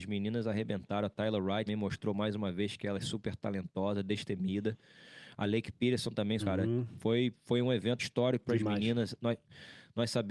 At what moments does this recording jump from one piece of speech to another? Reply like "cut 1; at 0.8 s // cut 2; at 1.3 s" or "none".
cut 1; at 1.7 s // cut 2; at 6.4 s // cut 3; at 8.0 s